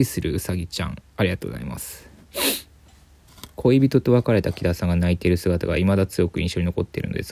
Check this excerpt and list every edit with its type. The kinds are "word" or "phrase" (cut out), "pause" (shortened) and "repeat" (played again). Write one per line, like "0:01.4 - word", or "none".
0:01.1 - pause